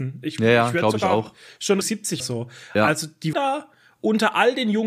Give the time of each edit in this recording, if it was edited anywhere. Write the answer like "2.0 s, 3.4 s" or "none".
1.8 s, 2.2 s, 3.3 s